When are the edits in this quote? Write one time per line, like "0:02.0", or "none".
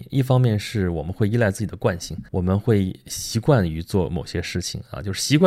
0:02.3